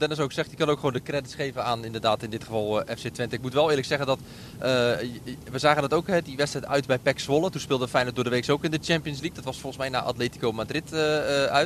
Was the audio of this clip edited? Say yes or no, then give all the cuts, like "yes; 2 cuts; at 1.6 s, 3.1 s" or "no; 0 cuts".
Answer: no; 0 cuts